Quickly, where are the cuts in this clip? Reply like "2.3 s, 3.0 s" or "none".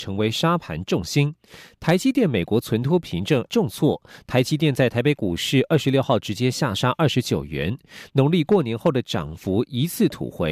3.5 s